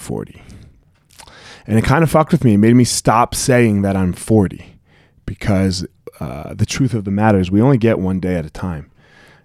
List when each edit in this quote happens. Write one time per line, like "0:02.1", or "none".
none

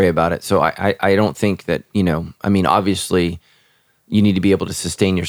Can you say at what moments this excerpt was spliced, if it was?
none

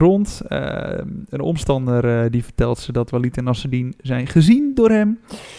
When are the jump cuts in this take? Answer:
none

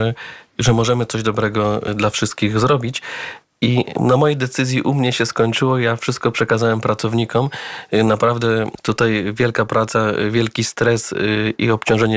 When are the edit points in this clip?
none

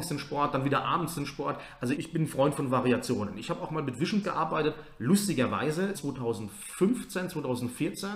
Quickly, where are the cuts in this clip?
0:01.9
0:04.2
0:05.9

